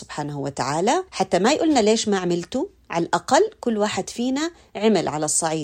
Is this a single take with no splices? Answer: no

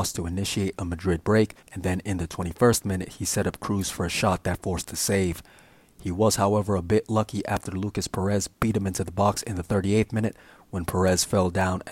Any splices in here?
yes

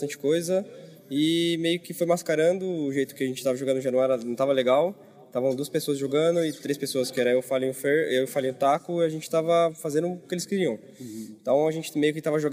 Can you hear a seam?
no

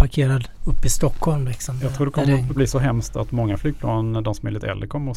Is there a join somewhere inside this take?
yes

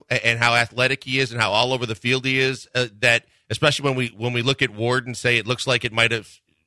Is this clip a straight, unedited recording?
yes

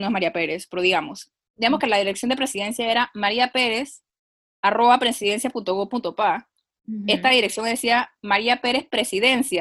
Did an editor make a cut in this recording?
no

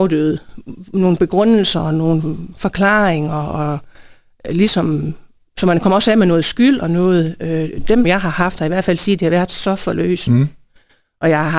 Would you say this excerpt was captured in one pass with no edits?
no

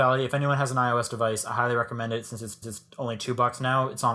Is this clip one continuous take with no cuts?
no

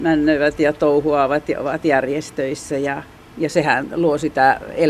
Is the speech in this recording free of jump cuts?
no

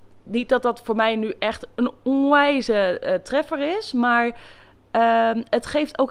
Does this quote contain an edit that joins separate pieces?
no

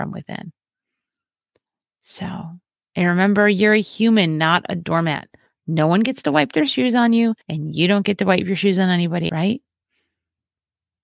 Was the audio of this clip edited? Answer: yes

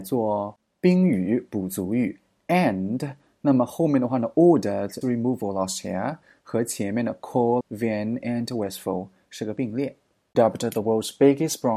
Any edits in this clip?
yes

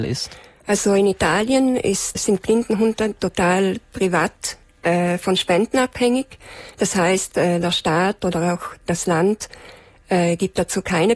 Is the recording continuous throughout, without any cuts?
no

